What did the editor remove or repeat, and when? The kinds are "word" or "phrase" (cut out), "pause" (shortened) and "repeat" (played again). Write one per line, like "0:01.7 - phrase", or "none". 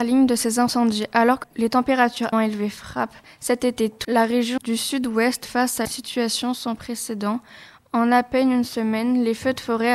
0:01.4 - word
0:02.3 - word
0:04.0 - word
0:04.6 - word
0:05.4 - word
0:05.8 - word